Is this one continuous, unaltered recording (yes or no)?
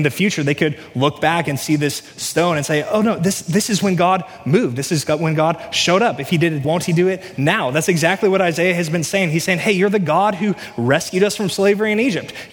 no